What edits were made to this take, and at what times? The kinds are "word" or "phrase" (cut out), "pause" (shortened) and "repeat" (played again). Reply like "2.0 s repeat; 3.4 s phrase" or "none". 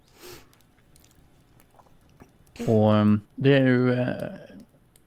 3.3 s pause